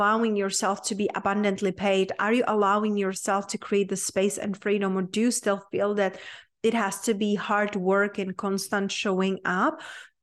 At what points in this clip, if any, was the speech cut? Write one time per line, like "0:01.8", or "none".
none